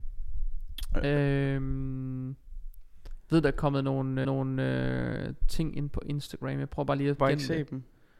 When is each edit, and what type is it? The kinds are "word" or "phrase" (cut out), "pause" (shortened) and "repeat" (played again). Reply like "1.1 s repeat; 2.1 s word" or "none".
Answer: 4.2 s repeat; 7.2 s phrase